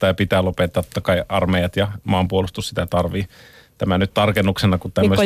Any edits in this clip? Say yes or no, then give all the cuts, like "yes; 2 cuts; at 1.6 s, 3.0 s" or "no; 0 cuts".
no; 0 cuts